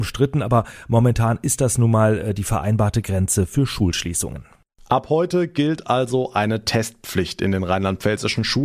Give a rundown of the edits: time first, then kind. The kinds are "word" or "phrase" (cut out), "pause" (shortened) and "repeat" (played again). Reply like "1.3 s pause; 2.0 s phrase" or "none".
none